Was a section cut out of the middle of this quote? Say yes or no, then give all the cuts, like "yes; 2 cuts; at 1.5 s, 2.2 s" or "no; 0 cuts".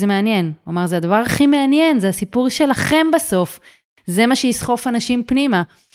no; 0 cuts